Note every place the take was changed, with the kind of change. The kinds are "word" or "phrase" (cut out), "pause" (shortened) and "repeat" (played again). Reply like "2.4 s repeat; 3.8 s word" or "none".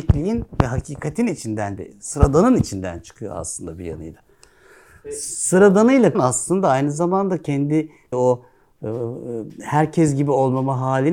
1.8 s word; 6.1 s word; 8.1 s word